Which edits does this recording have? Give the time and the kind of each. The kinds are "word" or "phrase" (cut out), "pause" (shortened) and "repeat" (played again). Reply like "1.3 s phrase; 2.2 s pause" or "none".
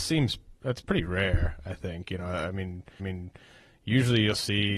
3.0 s repeat